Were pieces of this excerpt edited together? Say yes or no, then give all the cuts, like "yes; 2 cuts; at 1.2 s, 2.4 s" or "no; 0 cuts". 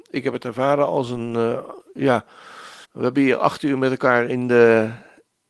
yes; 1 cut; at 2.8 s